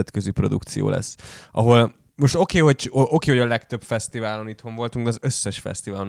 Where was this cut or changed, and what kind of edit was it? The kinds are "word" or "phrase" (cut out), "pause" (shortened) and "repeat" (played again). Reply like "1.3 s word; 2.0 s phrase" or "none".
2.1 s pause